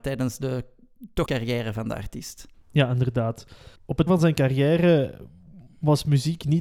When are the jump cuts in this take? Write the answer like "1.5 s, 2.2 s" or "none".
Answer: 1.3 s, 2.5 s, 3.8 s, 4.1 s

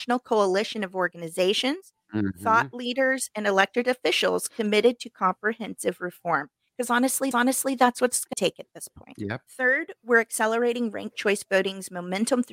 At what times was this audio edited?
7.3 s, 8.3 s, 9.5 s

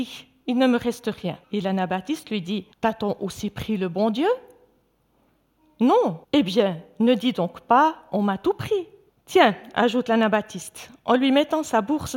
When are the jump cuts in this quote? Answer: 1.4 s, 2.7 s, 6.2 s, 9.1 s

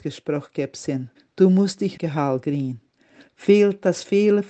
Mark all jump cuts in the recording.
1.2 s, 2.0 s

